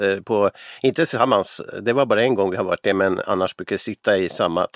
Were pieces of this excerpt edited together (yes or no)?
no